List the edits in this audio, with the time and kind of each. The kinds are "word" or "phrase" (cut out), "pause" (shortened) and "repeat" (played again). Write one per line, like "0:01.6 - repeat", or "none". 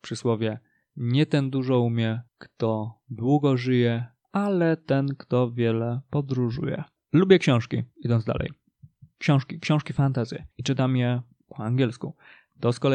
0:02.3 - pause
0:07.0 - pause
0:10.5 - pause